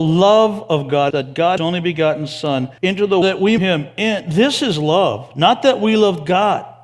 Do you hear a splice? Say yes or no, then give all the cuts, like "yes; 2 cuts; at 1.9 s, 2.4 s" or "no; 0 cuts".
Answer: yes; 5 cuts; at 1.1 s, 1.6 s, 2.8 s, 3.2 s, 3.6 s